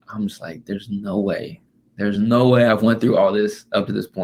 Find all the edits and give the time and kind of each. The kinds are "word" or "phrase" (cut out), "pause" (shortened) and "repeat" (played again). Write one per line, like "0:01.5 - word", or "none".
none